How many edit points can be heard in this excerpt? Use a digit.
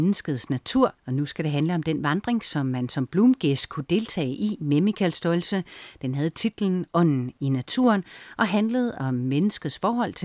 1